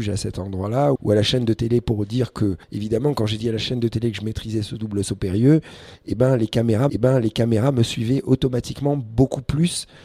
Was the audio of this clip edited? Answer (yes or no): yes